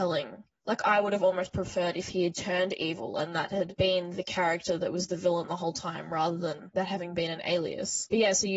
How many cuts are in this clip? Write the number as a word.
one